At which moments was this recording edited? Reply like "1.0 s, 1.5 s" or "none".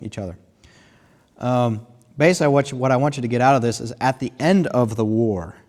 none